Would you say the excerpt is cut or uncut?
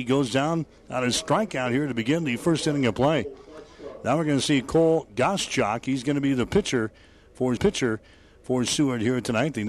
cut